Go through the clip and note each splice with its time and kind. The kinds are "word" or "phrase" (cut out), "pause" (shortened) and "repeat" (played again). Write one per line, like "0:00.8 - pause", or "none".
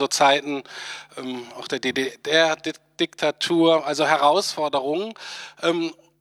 none